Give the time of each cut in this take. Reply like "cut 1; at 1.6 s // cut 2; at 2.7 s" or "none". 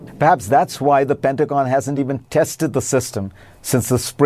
none